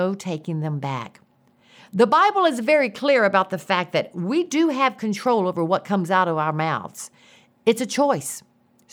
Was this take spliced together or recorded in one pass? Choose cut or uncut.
uncut